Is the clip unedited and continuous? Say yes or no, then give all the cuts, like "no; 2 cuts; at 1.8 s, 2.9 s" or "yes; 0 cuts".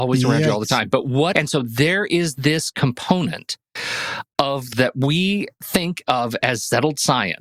no; 2 cuts; at 1.3 s, 4.7 s